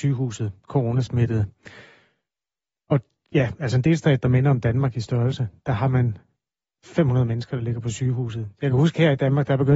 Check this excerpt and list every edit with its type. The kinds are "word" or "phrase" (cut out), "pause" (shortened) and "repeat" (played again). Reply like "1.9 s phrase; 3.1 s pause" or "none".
none